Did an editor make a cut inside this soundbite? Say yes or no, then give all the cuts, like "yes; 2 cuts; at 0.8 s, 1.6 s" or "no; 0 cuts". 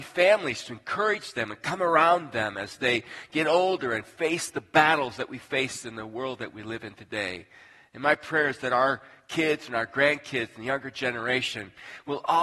no; 0 cuts